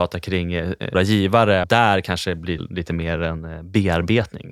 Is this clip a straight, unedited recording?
no; 3 cuts; at 0.9 s, 1.6 s, 2.6 s

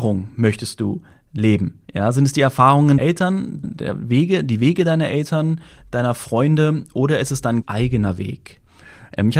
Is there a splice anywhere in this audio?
yes; 4 cuts; at 1.8 s, 3.0 s, 3.6 s, 7.6 s

